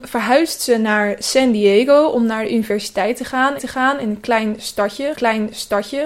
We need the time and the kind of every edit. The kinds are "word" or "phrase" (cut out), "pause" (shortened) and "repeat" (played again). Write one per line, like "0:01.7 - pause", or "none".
0:03.6 - repeat
0:05.1 - repeat

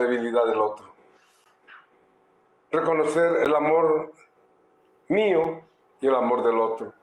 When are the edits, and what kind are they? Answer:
none

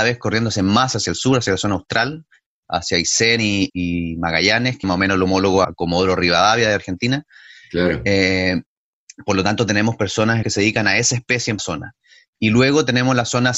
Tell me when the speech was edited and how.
0:03.7 - word
0:04.8 - word
0:05.6 - word
0:10.4 - word
0:11.6 - phrase

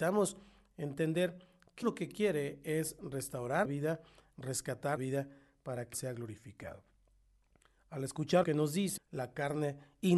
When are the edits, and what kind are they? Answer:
0:01.8 - word
0:03.7 - word
0:05.0 - word
0:05.9 - word
0:08.4 - word
0:09.0 - word

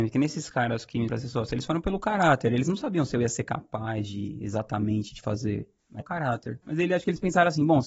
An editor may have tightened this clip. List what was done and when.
0:01.1 - word
0:06.0 - phrase

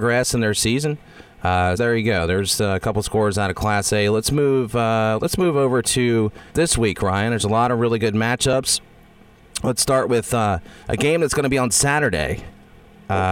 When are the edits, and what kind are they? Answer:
0:01.8 - word
0:06.5 - pause
0:10.8 - pause

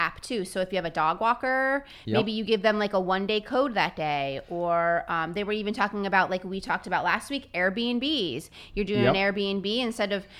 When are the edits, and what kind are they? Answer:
none

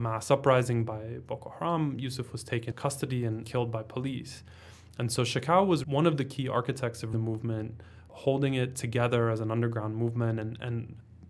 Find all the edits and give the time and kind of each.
0:02.7 - word
0:03.4 - word
0:05.8 - word
0:07.1 - word

